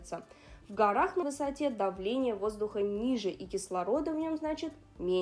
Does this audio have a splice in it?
yes; 1 cut; at 1.2 s

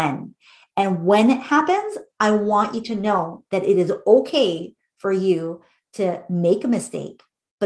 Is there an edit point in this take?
no; 0 cuts

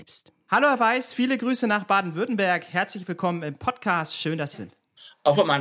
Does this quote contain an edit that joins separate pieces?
yes; 1 cut; at 4.5 s

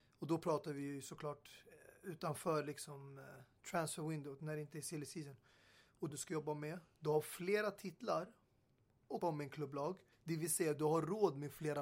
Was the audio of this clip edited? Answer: yes; 3 cuts; at 6.1 s, 9.2 s, 10.1 s

